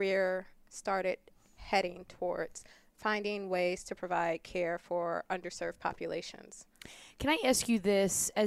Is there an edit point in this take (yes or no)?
no